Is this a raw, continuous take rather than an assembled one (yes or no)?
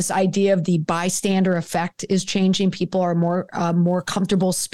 yes